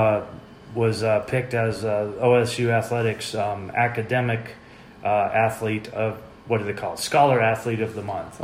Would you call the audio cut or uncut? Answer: uncut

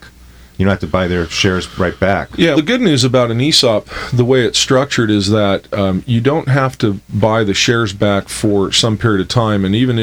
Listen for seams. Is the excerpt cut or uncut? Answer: cut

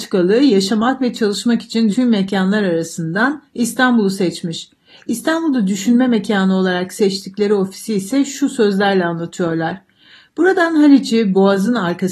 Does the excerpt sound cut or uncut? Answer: cut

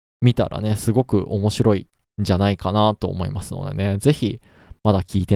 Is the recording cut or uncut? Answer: uncut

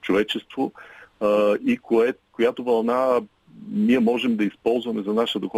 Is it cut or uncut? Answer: uncut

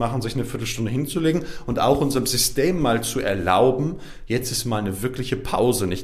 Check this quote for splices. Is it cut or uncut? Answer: uncut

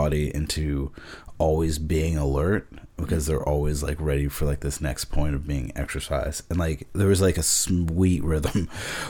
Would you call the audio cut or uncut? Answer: uncut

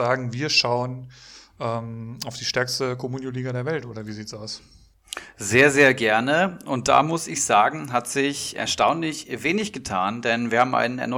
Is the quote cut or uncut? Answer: uncut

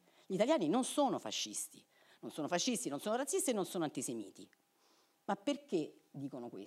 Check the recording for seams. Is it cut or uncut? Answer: uncut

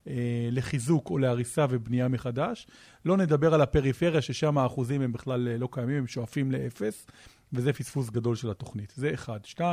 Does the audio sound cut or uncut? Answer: uncut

